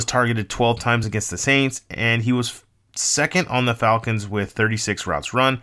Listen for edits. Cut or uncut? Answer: uncut